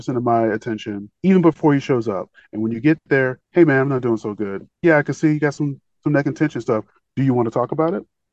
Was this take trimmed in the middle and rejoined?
yes; 3 cuts; at 1.1 s, 3.4 s, 4.7 s

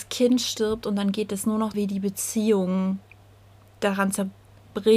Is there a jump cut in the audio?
yes; 1 cut; at 1.7 s

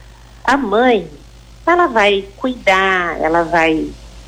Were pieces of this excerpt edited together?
no; 0 cuts

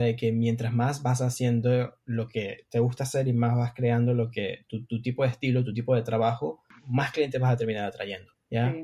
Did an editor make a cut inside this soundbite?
no; 0 cuts

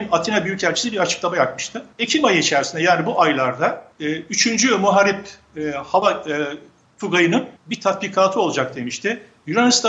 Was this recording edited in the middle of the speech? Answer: yes; 3 cuts; at 1.9 s, 3.9 s, 7.6 s

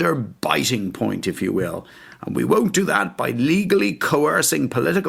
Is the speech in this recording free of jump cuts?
yes; 0 cuts

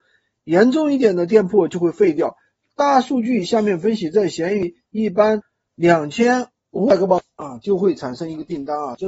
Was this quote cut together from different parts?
no; 0 cuts

